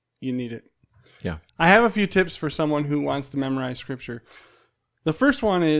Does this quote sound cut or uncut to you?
cut